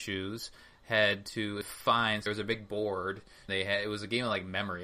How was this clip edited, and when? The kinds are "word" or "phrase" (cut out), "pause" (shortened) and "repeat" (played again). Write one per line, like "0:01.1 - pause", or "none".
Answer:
0:01.6 - word
0:02.3 - word
0:03.5 - word